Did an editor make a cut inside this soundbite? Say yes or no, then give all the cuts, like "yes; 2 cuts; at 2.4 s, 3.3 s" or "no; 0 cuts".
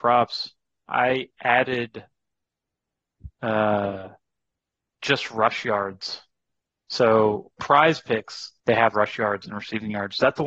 yes; 4 cuts; at 3.3 s, 7.6 s, 8.6 s, 8.9 s